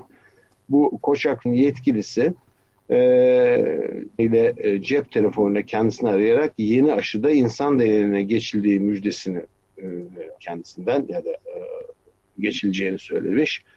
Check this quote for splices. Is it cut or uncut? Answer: cut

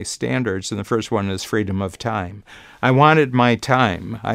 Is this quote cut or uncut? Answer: uncut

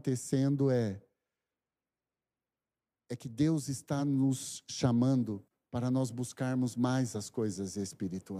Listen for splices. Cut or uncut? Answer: uncut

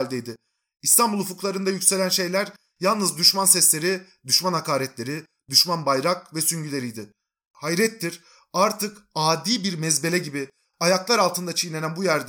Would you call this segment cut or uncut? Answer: uncut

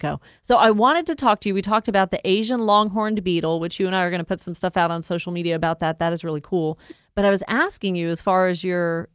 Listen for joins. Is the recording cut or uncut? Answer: uncut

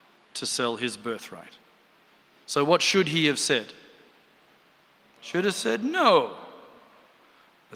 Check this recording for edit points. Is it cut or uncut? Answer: uncut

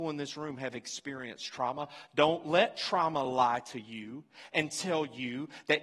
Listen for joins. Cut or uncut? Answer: uncut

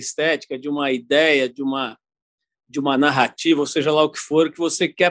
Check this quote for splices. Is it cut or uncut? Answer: uncut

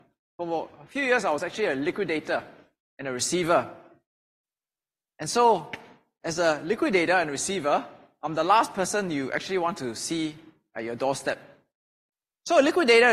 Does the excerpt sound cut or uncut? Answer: uncut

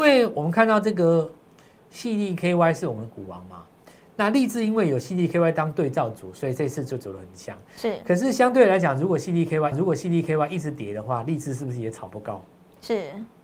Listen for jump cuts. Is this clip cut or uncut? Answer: cut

